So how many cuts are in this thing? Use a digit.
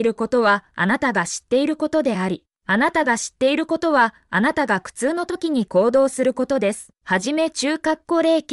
1